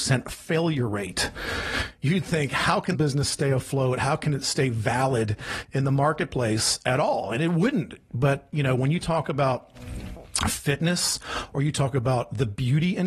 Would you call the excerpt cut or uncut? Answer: cut